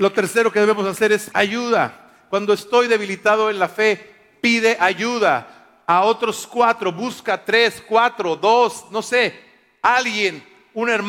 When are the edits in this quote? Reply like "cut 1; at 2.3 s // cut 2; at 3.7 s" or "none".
cut 1; at 1.3 s